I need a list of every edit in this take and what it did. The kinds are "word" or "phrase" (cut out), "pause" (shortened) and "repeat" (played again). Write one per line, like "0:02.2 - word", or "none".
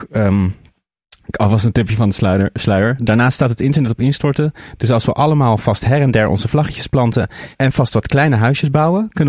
none